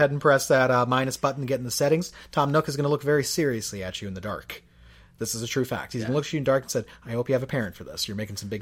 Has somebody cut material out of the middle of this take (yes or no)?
no